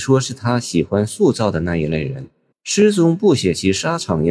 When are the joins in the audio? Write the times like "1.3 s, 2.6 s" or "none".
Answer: 2.5 s